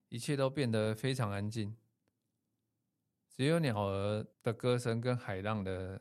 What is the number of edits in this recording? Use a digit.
1